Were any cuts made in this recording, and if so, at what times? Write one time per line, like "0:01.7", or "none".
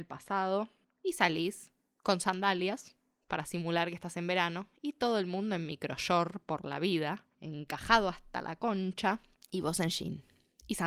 none

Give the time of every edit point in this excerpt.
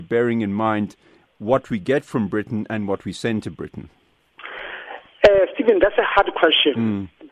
none

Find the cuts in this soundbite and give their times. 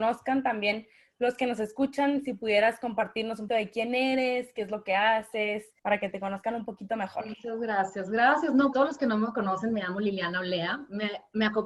0:03.5
0:05.8
0:08.7

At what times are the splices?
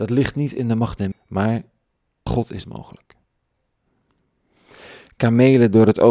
0:01.1
0:02.3
0:02.6

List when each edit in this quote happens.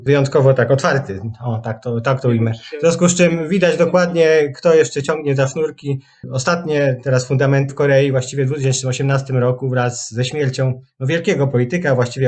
0:07.7

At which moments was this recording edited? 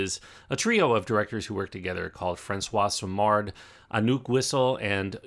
none

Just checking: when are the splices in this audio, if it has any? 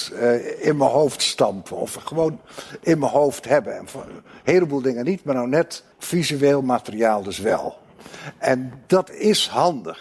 0:05.9

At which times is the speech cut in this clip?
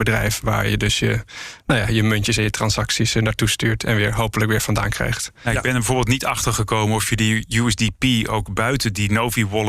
none

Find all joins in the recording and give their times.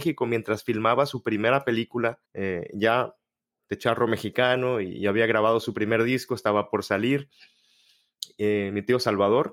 0:02.2

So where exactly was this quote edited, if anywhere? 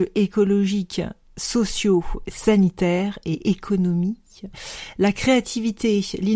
none

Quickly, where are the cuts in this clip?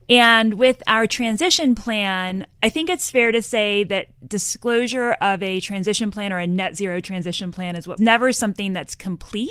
0:02.5
0:08.0

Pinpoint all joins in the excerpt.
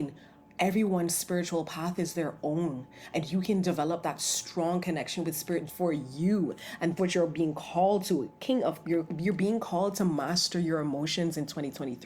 0:05.7
0:07.0
0:08.8

